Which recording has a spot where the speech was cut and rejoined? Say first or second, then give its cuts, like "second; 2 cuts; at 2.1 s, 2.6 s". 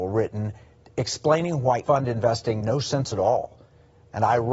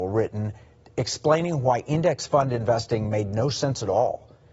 first; 2 cuts; at 1.8 s, 2.6 s